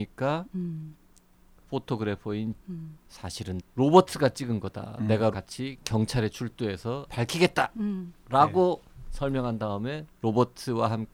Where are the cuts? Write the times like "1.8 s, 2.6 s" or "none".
2.6 s, 3.6 s, 5.3 s, 7.1 s